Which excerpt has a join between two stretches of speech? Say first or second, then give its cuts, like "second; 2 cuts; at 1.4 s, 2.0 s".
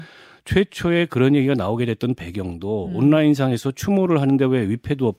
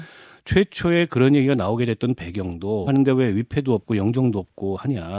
second; 1 cut; at 2.9 s